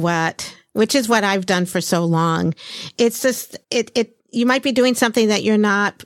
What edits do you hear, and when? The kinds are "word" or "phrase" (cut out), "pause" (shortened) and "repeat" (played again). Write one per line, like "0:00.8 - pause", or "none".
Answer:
0:03.6 - pause
0:04.2 - pause